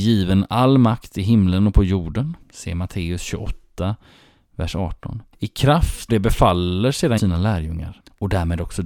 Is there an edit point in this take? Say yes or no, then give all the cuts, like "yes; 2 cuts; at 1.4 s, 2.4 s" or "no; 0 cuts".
yes; 3 cuts; at 2.4 s, 6.1 s, 7.2 s